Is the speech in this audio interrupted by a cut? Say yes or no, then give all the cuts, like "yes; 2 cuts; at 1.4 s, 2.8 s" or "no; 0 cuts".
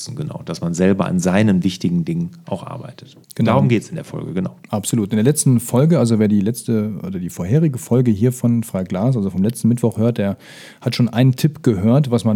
yes; 2 cuts; at 3.2 s, 4.6 s